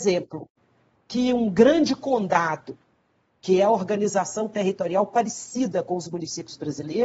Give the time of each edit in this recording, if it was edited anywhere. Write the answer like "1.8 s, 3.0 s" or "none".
none